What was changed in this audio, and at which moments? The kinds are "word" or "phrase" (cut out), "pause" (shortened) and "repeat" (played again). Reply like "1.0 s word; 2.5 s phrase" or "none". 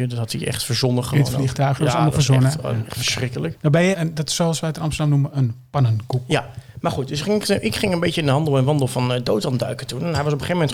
3.9 s word